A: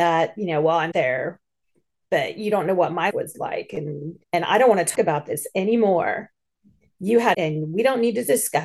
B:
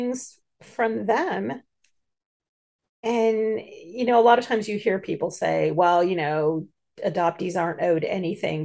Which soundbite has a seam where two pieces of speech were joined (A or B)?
A